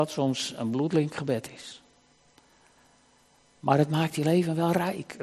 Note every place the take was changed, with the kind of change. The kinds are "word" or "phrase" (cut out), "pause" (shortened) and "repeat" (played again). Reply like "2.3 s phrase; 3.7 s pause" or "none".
none